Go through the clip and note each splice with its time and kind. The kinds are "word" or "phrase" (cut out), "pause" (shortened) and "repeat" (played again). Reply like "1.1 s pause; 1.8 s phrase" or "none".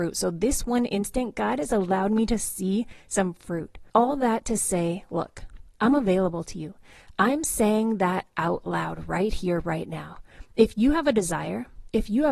3.9 s pause